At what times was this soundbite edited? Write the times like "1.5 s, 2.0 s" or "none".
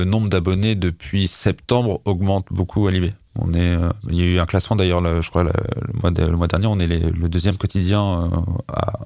none